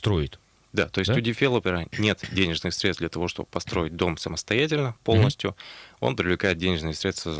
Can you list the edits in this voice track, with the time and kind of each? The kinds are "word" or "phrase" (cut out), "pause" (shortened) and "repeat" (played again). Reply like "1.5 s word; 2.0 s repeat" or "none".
none